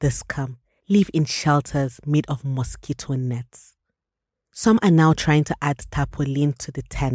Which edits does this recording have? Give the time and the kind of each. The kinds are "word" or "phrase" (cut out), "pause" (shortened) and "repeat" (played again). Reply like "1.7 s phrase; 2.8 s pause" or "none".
none